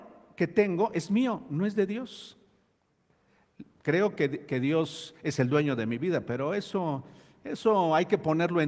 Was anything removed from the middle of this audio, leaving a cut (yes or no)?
no